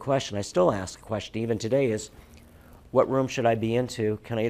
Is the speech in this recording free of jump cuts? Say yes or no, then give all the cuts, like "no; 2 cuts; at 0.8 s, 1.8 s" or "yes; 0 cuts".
yes; 0 cuts